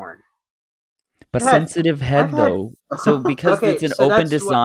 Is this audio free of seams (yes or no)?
no